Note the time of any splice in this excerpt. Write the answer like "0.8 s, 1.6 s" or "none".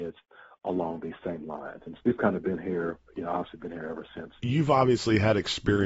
2.0 s, 4.4 s